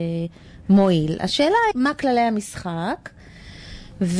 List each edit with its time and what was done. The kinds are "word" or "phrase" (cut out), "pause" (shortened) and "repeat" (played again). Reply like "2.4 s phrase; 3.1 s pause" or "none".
1.7 s word